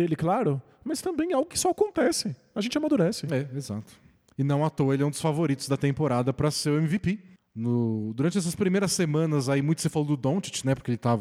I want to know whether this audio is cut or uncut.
uncut